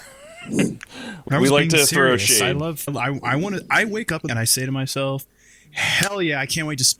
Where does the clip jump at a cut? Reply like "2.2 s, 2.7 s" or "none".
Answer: 1.3 s, 2.9 s, 4.3 s